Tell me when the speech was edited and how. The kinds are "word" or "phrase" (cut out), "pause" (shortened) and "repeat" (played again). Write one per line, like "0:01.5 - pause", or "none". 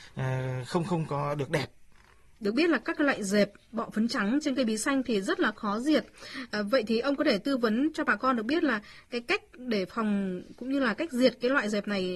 none